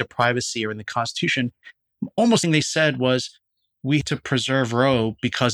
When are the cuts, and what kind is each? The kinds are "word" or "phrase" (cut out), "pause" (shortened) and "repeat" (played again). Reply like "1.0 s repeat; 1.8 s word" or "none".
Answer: 2.4 s word; 4.0 s word